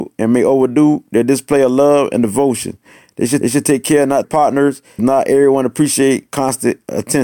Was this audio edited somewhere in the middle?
yes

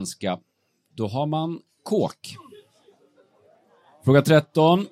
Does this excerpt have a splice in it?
no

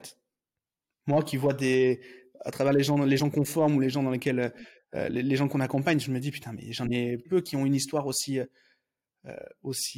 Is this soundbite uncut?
no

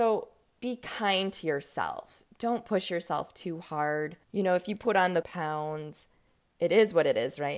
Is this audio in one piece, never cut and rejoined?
no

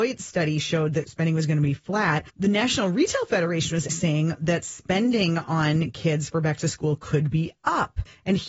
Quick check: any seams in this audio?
yes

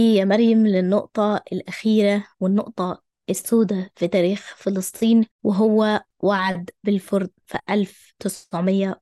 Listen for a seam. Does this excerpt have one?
yes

